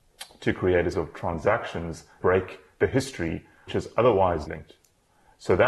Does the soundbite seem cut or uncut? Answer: cut